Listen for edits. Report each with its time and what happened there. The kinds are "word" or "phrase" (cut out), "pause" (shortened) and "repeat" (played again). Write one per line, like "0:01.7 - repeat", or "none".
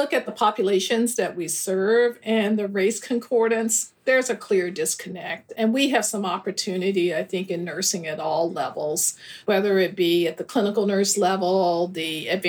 0:04.0 - pause